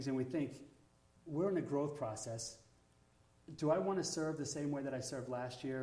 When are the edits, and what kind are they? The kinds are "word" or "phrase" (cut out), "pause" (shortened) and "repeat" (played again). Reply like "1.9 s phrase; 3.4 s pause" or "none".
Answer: none